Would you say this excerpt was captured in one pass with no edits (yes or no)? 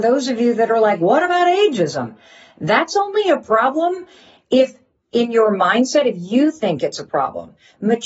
yes